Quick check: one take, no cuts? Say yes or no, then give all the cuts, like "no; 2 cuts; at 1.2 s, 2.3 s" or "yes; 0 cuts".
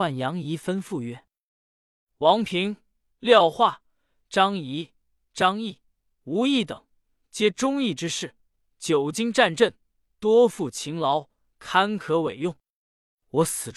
yes; 0 cuts